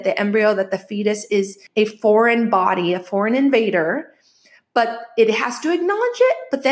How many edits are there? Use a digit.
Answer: 1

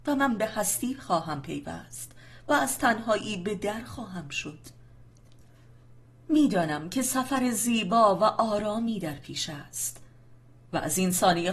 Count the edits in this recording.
0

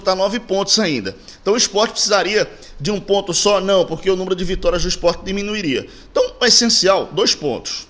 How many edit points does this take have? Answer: 0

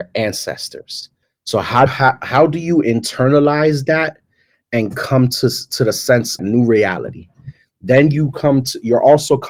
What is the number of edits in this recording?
3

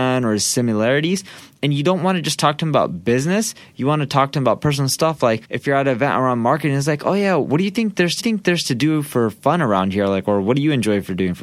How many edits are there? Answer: 2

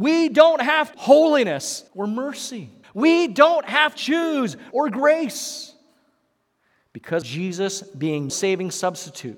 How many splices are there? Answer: 7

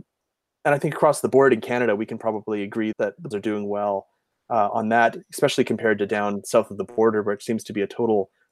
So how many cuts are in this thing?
2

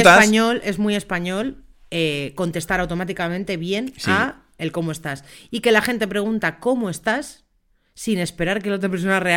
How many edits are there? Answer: 0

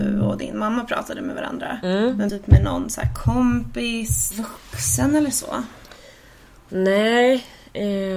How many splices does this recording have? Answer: 2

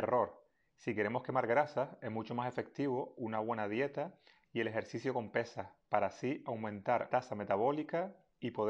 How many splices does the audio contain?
1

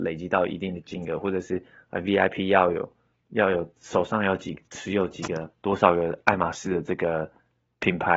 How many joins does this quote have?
1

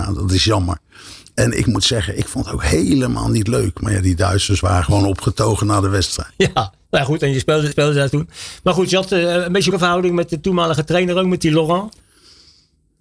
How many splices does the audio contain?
2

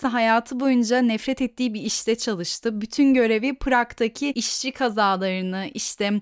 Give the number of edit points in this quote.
0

